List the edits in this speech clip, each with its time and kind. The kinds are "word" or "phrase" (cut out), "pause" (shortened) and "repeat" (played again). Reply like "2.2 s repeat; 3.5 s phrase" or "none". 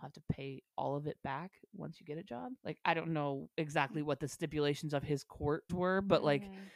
2.6 s pause; 5.7 s word